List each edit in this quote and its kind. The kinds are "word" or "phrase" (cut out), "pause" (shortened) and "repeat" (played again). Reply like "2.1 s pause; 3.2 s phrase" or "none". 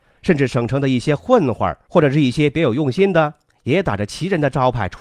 none